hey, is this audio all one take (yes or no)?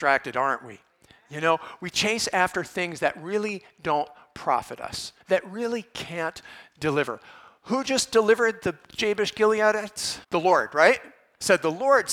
no